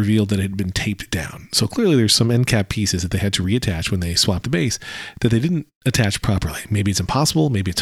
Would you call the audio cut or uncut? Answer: cut